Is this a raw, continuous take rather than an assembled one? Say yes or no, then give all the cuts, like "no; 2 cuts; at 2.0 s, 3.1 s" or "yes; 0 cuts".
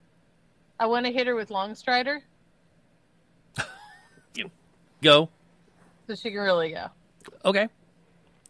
no; 2 cuts; at 4.3 s, 5.0 s